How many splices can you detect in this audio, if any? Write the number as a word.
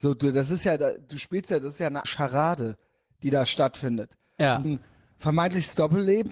two